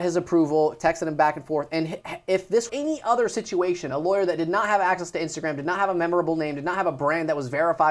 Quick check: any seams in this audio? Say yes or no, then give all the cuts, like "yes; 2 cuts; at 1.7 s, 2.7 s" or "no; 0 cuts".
yes; 1 cut; at 2.7 s